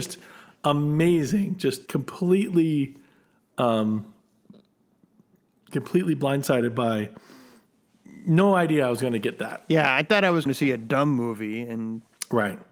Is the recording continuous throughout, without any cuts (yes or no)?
no